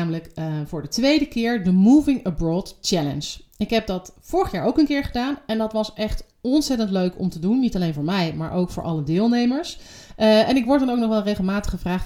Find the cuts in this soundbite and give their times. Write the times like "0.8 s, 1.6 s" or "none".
none